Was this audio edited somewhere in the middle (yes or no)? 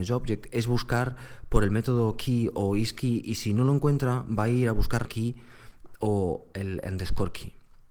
yes